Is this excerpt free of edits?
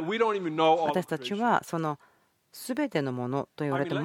yes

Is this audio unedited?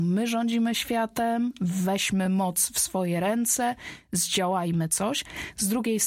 yes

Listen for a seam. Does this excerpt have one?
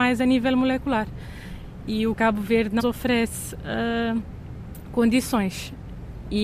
yes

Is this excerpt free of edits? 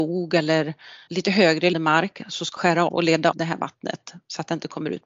no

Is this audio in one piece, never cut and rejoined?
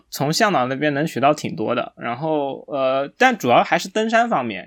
yes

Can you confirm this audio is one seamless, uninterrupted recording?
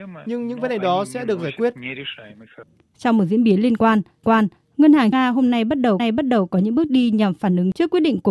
no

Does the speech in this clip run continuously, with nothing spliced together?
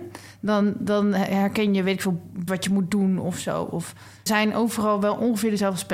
no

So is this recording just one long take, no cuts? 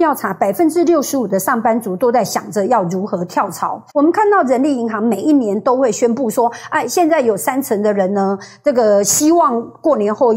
no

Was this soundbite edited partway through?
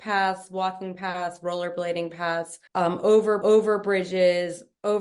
yes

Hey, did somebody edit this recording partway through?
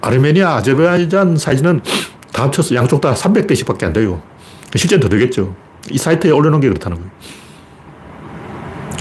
no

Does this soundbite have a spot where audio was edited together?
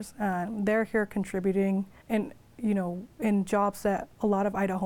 yes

